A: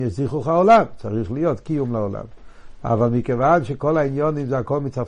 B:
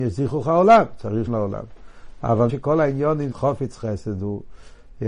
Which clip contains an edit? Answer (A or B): B